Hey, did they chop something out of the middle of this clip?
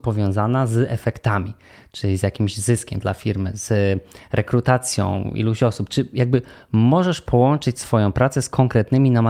yes; 1 cut; at 3.0 s

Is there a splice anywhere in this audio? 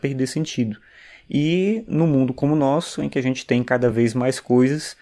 no; 0 cuts

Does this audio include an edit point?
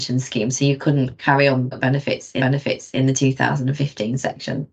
yes; 2 cuts; at 1.7 s, 2.4 s

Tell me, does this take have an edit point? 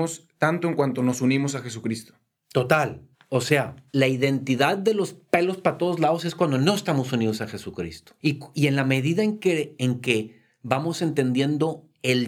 yes; 3 cuts; at 3.1 s, 3.9 s, 8.2 s

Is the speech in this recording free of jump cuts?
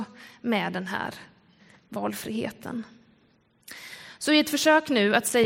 yes; 0 cuts

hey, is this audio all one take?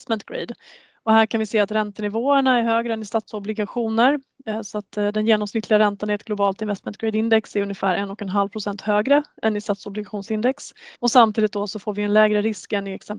no; 1 cut; at 11.0 s

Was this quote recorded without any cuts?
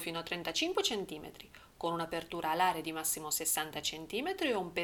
yes; 0 cuts

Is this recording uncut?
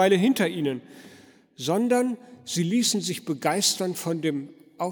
yes; 0 cuts

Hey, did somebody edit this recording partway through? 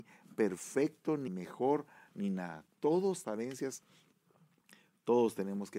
yes; 2 cuts; at 1.3 s, 3.2 s

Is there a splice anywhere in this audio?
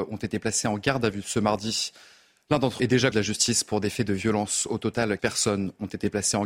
yes; 3 cuts; at 2.8 s, 3.1 s, 5.2 s

